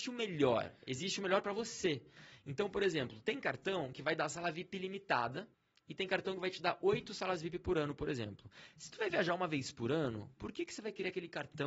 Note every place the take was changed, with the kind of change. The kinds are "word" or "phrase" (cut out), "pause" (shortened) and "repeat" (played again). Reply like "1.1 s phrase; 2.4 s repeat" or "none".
5.5 s pause